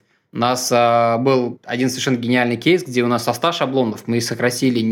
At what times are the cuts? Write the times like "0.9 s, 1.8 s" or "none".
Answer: none